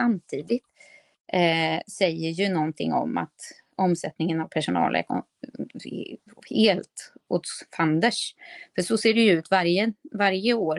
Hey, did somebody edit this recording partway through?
no; 0 cuts

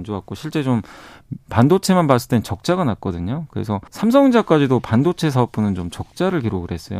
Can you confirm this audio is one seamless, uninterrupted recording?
no; 1 cut; at 3.9 s

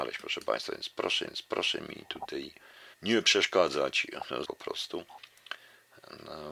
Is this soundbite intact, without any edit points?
no; 3 cuts; at 1.3 s, 2.9 s, 4.4 s

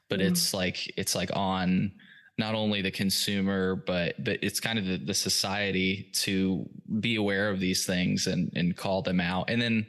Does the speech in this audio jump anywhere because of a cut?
no; 0 cuts

